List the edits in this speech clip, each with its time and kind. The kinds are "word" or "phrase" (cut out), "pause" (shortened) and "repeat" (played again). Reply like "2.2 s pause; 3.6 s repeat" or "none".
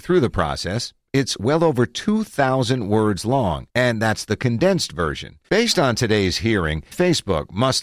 3.7 s pause; 5.4 s pause; 6.9 s word

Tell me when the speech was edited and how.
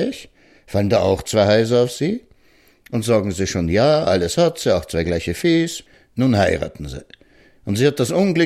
none

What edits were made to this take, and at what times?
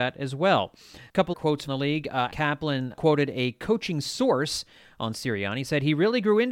1.3 s word; 1.7 s word; 2.3 s word; 2.9 s word

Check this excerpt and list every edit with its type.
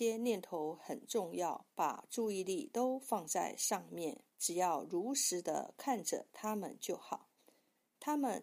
1.7 s pause; 4.3 s pause

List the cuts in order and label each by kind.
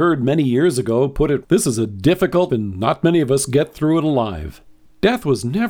1.4 s word; 2.5 s word

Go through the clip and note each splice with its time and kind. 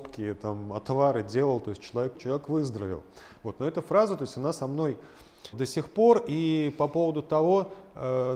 2.1 s word; 5.5 s word

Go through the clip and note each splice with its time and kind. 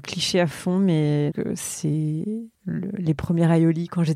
1.3 s word; 2.5 s pause

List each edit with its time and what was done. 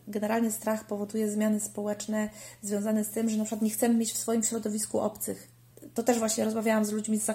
none

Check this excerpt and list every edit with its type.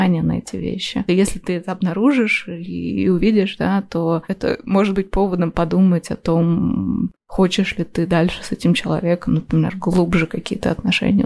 7.2 s pause

